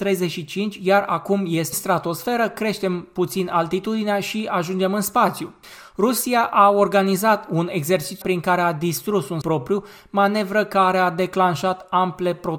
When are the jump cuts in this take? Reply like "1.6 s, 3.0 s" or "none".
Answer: 1.7 s, 8.2 s, 9.4 s